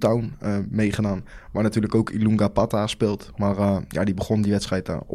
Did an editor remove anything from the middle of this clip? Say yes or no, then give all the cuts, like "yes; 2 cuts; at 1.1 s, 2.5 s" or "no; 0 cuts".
no; 0 cuts